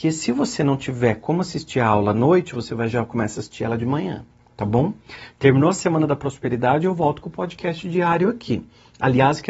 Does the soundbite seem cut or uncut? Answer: uncut